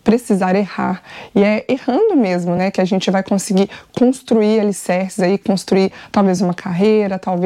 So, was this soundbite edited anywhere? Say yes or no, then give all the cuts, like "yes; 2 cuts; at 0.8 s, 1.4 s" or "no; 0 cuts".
no; 0 cuts